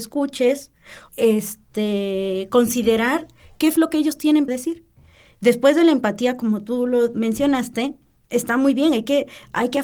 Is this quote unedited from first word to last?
no; 2 cuts; at 1.1 s, 4.5 s

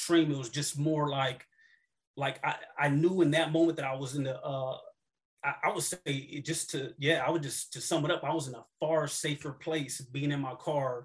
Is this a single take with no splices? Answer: yes; 0 cuts

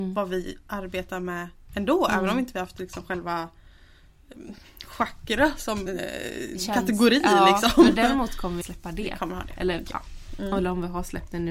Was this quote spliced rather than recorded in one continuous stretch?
yes; 2 cuts; at 5.9 s, 8.6 s

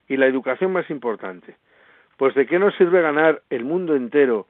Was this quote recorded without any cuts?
yes; 0 cuts

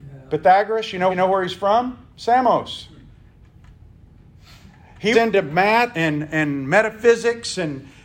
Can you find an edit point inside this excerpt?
yes; 4 cuts; at 1.1 s, 2.1 s, 5.1 s, 5.9 s

